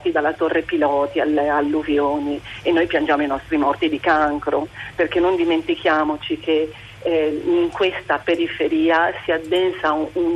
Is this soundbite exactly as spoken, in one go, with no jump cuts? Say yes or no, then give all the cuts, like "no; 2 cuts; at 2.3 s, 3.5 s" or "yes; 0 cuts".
yes; 0 cuts